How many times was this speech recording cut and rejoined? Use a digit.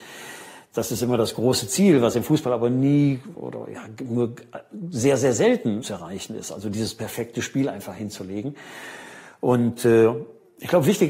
2